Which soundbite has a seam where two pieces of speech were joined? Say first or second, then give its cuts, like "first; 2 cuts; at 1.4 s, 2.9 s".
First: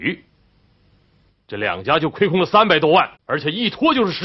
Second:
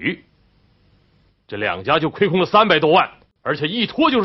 first; 1 cut; at 3.2 s